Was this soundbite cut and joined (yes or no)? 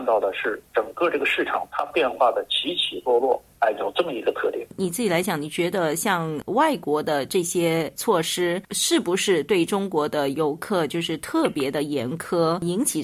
no